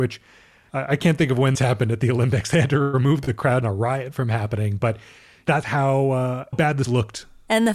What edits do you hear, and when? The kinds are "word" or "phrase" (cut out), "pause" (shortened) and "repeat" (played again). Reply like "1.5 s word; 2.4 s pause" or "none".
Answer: 1.5 s word; 3.6 s phrase; 5.6 s word; 6.5 s word; 6.8 s word